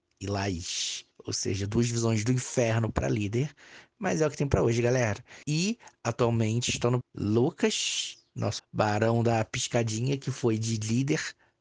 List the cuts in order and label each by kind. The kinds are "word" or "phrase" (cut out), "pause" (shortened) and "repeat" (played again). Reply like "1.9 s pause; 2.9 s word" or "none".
1.1 s pause; 5.4 s pause; 7.0 s word; 8.6 s word